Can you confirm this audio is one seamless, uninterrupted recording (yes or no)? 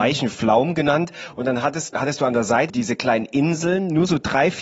no